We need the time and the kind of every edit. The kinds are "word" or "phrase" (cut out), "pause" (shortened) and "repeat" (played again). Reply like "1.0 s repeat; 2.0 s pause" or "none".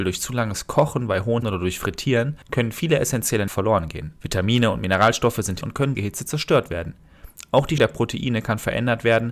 1.4 s word; 2.4 s pause; 3.5 s word; 4.2 s pause; 5.6 s word; 5.9 s phrase; 7.8 s word